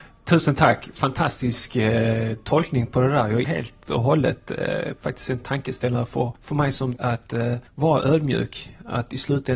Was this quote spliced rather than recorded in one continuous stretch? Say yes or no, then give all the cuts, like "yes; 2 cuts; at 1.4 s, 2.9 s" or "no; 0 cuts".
yes; 4 cuts; at 3.4 s, 6.4 s, 7.0 s, 7.7 s